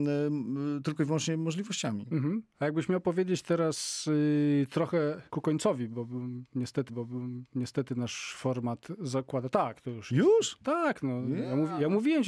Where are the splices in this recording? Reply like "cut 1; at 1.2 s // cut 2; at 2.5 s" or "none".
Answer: cut 1; at 5.3 s // cut 2; at 6.9 s